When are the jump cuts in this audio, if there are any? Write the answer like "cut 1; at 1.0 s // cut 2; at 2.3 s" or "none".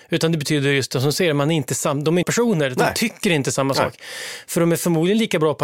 cut 1; at 2.2 s